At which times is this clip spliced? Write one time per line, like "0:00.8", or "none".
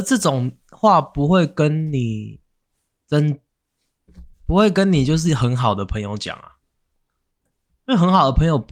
0:04.3